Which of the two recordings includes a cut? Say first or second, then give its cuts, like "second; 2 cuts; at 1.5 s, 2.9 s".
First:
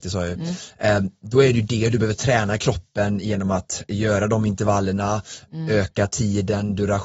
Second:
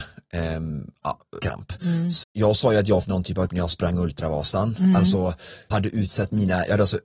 second; 5 cuts; at 1.4 s, 2.2 s, 3.0 s, 3.5 s, 5.7 s